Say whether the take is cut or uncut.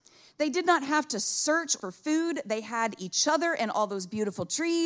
cut